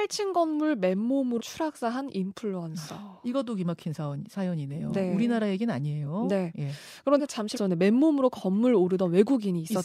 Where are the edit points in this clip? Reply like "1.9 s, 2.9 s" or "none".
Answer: 1.4 s, 7.2 s, 7.6 s